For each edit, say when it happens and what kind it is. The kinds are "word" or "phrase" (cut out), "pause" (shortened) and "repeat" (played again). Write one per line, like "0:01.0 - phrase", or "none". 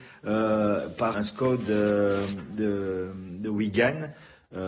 0:01.1 - word